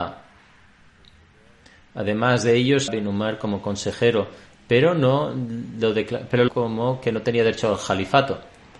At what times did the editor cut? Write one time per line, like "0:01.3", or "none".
0:02.9
0:06.5